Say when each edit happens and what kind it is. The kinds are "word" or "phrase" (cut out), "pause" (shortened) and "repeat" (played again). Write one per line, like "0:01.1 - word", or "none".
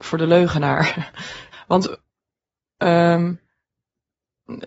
0:01.5 - word